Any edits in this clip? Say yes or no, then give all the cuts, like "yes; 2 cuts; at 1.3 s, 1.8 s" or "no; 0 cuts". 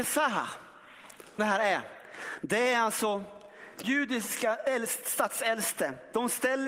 yes; 2 cuts; at 1.4 s, 3.8 s